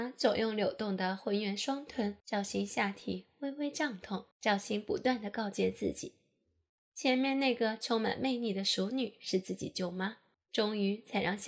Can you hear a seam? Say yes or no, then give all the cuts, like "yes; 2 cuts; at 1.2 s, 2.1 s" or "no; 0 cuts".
yes; 3 cuts; at 2.2 s, 4.3 s, 10.3 s